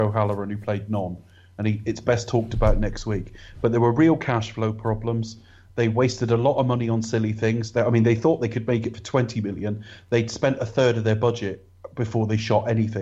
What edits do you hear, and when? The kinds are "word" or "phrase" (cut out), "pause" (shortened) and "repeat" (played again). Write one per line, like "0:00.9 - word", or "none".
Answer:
none